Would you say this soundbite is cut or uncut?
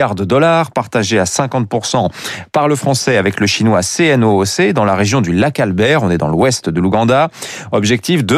uncut